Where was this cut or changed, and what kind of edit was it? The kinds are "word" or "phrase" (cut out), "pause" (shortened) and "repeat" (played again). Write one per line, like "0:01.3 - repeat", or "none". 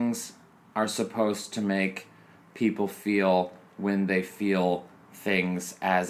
none